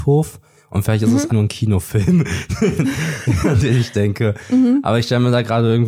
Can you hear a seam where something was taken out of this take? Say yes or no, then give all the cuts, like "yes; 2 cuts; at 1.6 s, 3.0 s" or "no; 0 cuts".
yes; 1 cut; at 1.3 s